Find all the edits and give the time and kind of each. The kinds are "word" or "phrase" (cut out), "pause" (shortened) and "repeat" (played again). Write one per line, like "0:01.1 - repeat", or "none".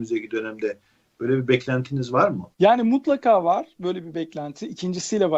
0:02.5 - pause